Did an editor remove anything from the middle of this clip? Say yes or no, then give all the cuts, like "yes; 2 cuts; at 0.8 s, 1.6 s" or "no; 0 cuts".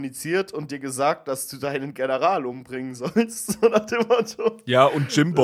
no; 0 cuts